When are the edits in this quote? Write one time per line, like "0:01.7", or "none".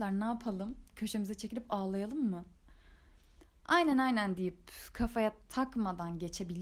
none